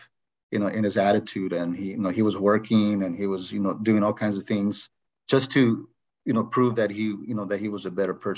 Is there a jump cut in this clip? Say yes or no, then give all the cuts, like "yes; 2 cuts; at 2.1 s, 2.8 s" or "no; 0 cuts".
no; 0 cuts